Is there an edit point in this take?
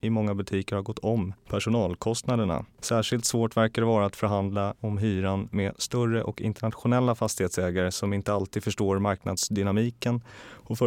no; 0 cuts

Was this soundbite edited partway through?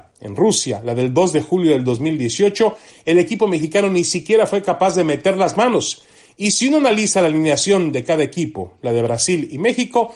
no; 0 cuts

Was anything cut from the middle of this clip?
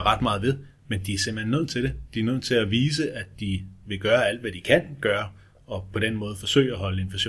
no; 0 cuts

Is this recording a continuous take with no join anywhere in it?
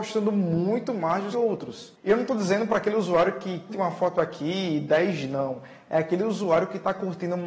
no; 2 cuts; at 1.3 s, 3.7 s

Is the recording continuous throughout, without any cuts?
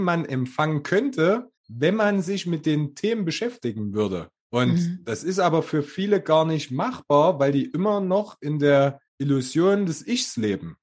no; 2 cuts; at 1.6 s, 9.1 s

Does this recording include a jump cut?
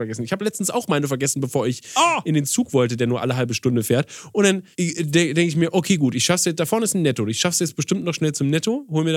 yes; 1 cut; at 4.7 s

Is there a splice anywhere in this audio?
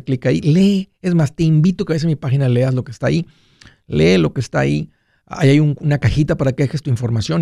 no; 0 cuts

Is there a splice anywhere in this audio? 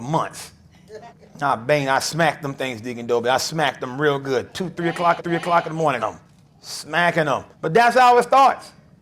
yes; 4 cuts; at 1.1 s, 5.2 s, 6.0 s, 7.5 s

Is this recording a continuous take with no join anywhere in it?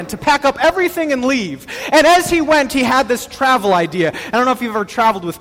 yes; 0 cuts

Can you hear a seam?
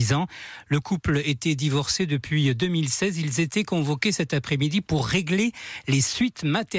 no; 0 cuts

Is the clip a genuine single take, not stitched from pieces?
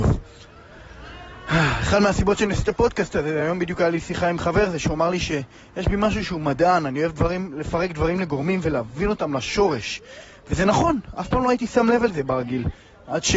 yes; 0 cuts

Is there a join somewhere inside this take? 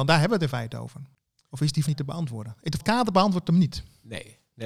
yes; 2 cuts; at 1.9 s, 2.8 s

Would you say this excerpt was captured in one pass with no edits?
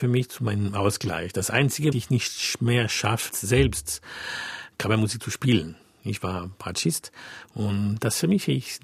no; 2 cuts; at 1.9 s, 3.3 s

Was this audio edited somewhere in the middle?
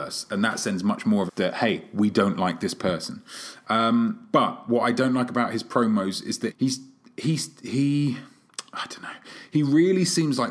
yes; 2 cuts; at 1.3 s, 6.5 s

